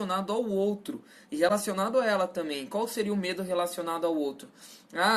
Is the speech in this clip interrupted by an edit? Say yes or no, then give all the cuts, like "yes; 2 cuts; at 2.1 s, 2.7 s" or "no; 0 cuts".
no; 0 cuts